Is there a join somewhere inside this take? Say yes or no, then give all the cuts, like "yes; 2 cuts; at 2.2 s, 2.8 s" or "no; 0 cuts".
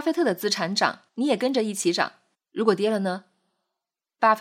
yes; 2 cuts; at 1.1 s, 2.3 s